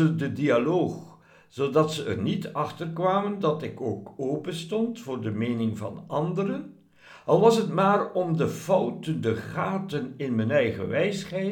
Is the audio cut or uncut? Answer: uncut